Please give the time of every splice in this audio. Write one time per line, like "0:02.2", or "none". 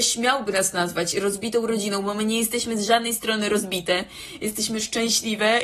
none